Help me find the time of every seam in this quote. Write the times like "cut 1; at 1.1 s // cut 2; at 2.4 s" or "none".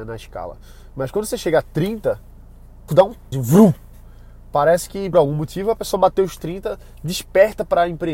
cut 1; at 2.9 s // cut 2; at 3.3 s // cut 3; at 5.1 s